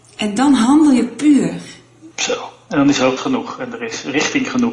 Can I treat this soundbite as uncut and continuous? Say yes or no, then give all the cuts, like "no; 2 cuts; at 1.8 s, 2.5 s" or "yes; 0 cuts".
no; 2 cuts; at 2.1 s, 3.2 s